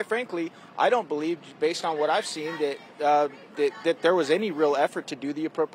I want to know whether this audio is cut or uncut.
uncut